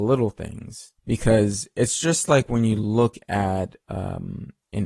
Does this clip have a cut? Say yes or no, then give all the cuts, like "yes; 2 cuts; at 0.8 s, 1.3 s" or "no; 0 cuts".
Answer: yes; 1 cut; at 1.0 s